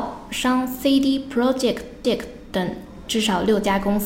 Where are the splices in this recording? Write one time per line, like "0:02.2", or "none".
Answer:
0:02.0

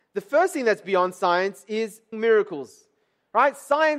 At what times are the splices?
0:02.1

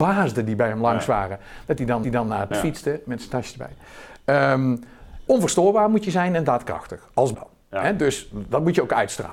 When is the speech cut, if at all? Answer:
0:02.0
0:02.5
0:05.3
0:07.3

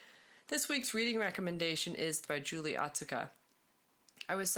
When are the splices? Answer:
0:02.2

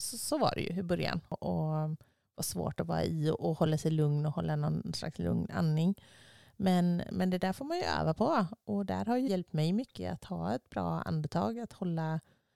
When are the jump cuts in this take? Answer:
0:09.3

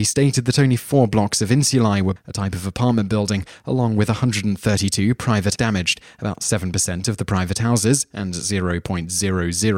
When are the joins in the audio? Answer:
0:02.2
0:05.6

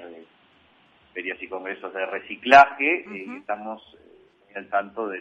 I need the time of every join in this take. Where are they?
none

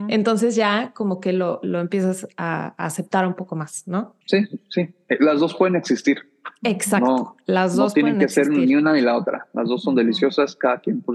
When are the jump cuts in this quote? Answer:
0:04.2

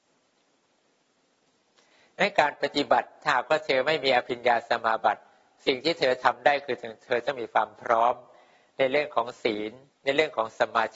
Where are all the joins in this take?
0:09.9

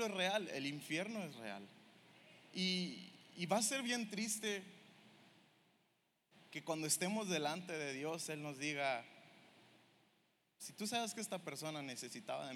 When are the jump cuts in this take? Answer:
none

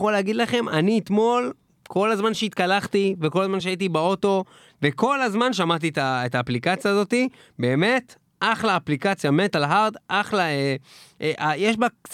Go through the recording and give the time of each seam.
none

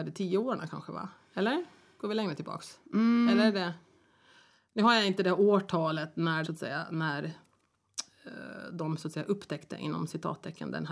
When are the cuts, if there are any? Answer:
0:06.4

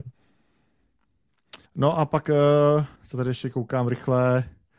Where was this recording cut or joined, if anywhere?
0:01.7
0:03.0

